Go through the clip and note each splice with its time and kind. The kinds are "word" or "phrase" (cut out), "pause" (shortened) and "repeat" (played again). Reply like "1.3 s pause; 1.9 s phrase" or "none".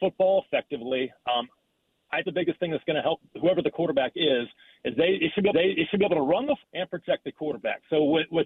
2.2 s phrase; 5.5 s repeat; 6.6 s word

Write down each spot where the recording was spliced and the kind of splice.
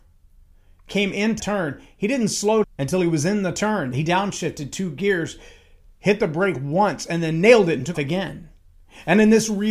1.4 s word; 2.6 s word; 7.9 s word

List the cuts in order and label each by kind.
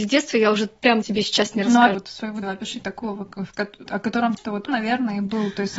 1.0 s word; 1.9 s word; 2.4 s word; 3.8 s word; 4.4 s word; 4.7 s word

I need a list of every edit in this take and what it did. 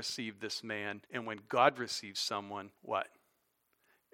1.1 s pause; 2.8 s pause

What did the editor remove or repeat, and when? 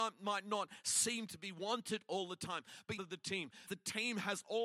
3.0 s phrase; 3.7 s word

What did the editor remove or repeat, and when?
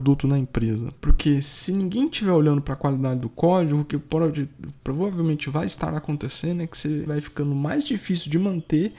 1.0 s pause; 7.1 s word

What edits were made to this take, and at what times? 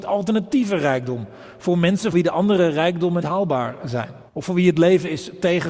2.1 s word; 3.2 s word; 4.3 s pause

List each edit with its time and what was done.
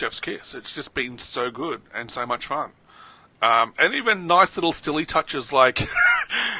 none

